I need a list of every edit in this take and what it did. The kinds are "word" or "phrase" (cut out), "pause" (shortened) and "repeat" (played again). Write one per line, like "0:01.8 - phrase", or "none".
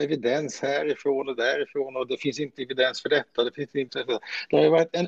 0:01.4 - phrase
0:03.9 - word